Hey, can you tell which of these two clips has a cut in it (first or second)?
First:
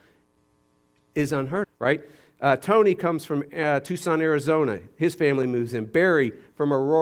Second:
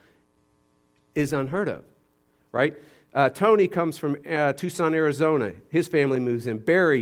first